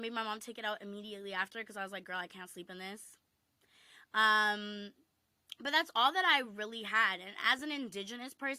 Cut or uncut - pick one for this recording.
uncut